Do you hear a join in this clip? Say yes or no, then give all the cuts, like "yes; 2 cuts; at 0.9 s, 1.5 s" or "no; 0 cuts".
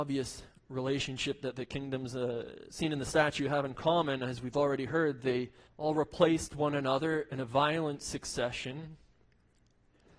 yes; 1 cut; at 5.7 s